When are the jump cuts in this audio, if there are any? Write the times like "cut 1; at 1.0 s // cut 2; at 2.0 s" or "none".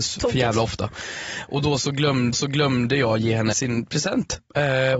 cut 1; at 2.3 s // cut 2; at 3.5 s